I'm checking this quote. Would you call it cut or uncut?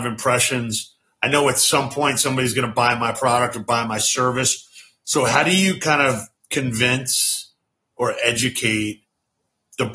uncut